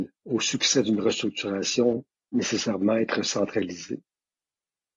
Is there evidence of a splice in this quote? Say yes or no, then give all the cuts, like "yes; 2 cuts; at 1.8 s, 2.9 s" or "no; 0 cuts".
yes; 1 cut; at 2.3 s